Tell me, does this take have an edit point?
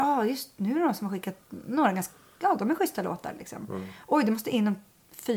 no; 0 cuts

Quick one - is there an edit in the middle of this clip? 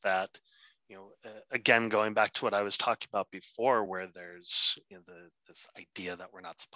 no; 0 cuts

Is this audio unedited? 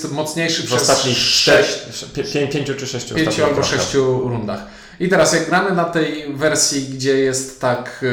yes; 0 cuts

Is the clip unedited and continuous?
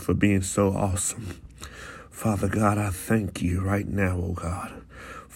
yes; 0 cuts

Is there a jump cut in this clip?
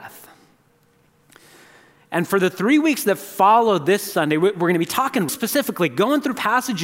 yes; 1 cut; at 5.3 s

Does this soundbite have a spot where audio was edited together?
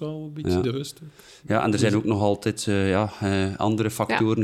no; 0 cuts

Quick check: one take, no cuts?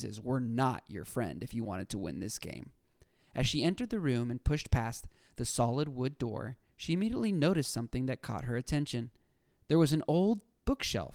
yes; 0 cuts

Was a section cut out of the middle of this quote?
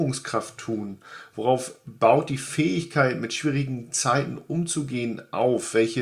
no; 0 cuts

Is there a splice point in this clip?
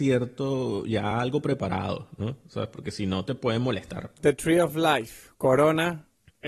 no; 0 cuts

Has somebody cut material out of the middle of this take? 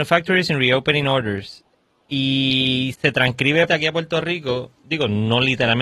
yes; 2 cuts; at 2.9 s, 3.7 s

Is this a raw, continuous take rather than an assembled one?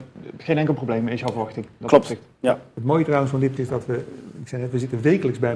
no; 1 cut; at 3.6 s

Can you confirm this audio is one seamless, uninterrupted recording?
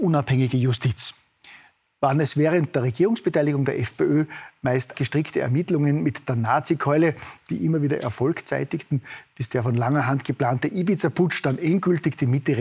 no; 1 cut; at 4.9 s

